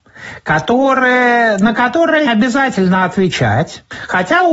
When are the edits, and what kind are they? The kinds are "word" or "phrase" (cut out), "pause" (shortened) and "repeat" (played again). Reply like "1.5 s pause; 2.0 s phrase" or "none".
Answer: 2.3 s word